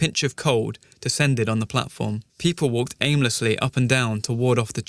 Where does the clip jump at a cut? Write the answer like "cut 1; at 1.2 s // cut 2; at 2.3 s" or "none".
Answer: cut 1; at 2.3 s